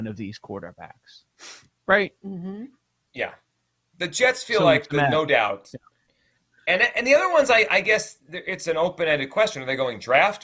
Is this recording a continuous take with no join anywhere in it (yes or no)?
yes